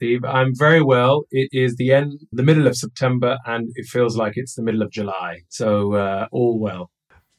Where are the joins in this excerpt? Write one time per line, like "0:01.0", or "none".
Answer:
0:02.3